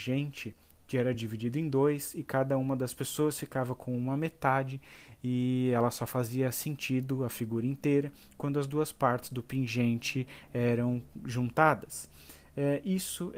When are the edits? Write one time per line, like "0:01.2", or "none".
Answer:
none